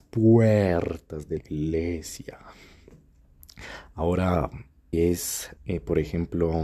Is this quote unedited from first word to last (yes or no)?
no